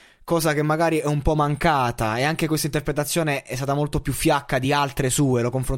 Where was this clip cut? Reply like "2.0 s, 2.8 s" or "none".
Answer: none

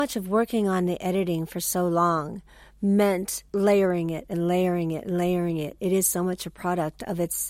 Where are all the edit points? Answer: 3.5 s

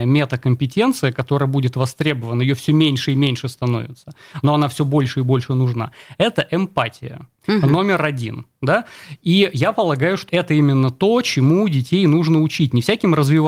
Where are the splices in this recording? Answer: 7.4 s, 10.3 s

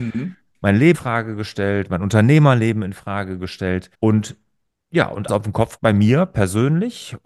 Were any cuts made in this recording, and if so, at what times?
0.9 s, 3.9 s, 5.3 s, 5.8 s

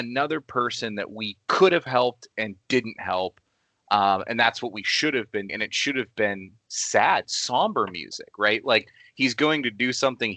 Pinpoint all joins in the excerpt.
5.5 s

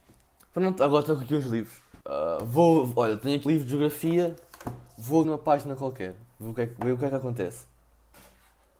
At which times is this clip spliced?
2.0 s, 3.5 s, 5.2 s

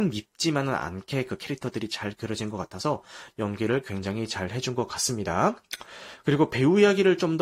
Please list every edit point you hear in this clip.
none

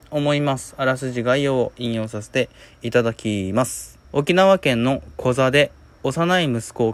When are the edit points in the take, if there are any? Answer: 4.0 s

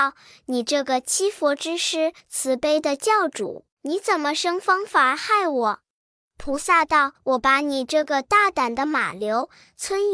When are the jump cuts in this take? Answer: 2.2 s, 3.7 s, 7.2 s

